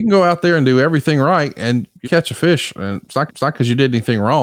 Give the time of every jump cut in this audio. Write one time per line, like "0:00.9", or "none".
0:02.0
0:03.3

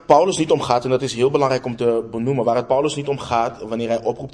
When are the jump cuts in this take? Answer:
none

